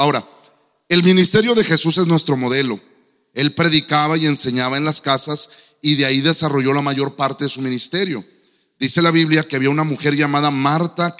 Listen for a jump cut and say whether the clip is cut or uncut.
uncut